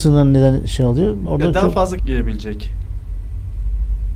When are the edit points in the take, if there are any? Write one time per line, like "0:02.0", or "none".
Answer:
0:01.3
0:02.0